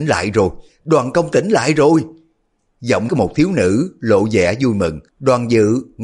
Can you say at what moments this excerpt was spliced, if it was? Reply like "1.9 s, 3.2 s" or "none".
1.3 s, 3.1 s, 5.1 s